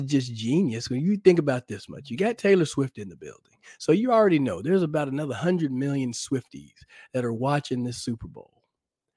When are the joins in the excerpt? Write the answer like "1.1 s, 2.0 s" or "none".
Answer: none